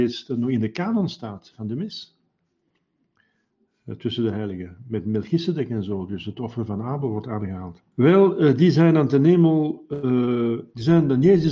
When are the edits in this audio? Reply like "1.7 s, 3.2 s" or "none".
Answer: 7.9 s